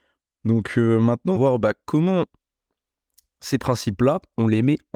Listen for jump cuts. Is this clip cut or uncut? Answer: cut